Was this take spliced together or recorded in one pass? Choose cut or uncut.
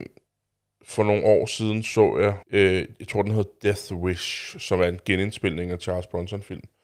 cut